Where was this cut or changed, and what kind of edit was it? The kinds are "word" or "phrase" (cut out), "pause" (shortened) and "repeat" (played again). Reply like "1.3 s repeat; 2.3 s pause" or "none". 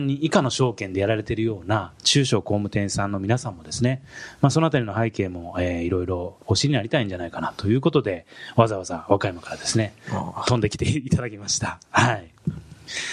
6.4 s pause